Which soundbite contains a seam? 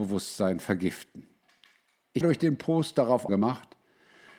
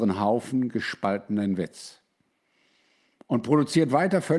first; 2 cuts; at 2.2 s, 3.3 s

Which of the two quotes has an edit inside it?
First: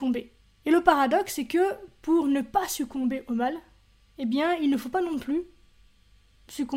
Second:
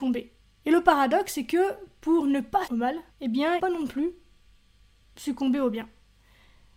second; 3 cuts; at 2.7 s, 3.1 s, 3.6 s

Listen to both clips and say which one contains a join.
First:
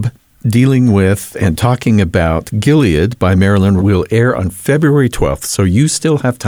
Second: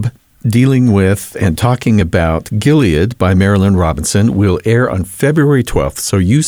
first; 1 cut; at 3.8 s

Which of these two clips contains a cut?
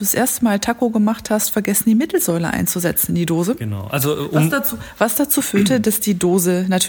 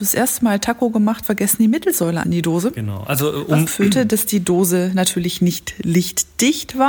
second; 3 cuts; at 1.2 s, 2.2 s, 3.7 s

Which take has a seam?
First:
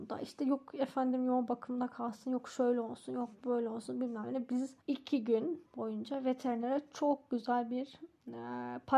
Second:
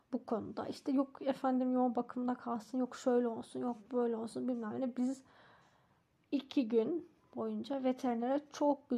first; 2 cuts; at 4.8 s, 5.7 s

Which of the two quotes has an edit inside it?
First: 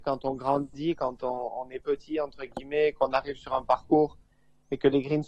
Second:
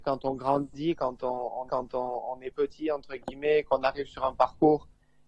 second; 1 cut; at 1.7 s

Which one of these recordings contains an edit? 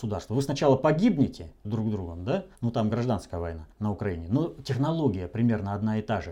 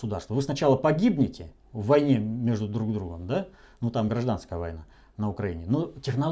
first; 3 cuts; at 1.6 s, 2.5 s, 3.7 s

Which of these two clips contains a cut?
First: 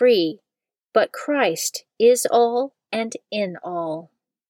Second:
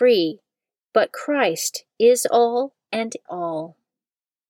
second; 1 cut; at 3.3 s

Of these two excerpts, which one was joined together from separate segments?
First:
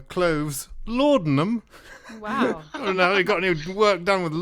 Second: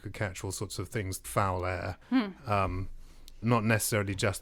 second; 3 cuts; at 1.2 s, 2.0 s, 3.4 s

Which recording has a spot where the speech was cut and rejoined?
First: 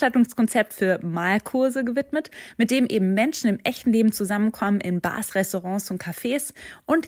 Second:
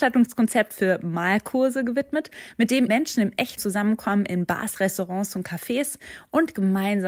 second; 2 cuts; at 2.9 s, 3.6 s

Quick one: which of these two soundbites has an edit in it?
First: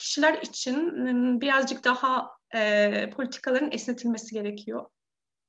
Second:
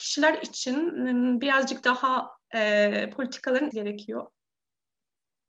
second; 1 cut; at 3.7 s

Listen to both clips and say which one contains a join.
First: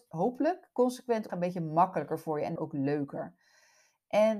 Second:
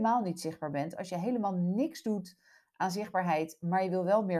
first; 2 cuts; at 1.3 s, 2.6 s

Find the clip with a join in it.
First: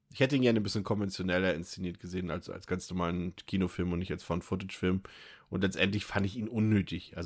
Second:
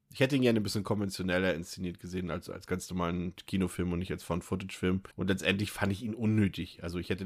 second; 1 cut; at 5.1 s

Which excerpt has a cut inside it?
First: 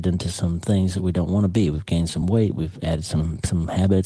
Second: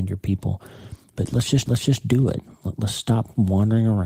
second; 1 cut; at 1.7 s

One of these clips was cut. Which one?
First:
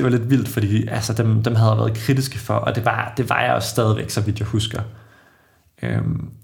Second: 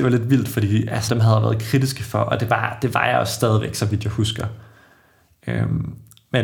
second; 1 cut; at 1.1 s

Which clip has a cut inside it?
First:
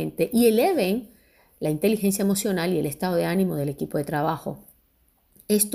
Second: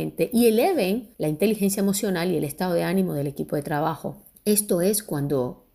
second; 2 cuts; at 1.1 s, 4.3 s

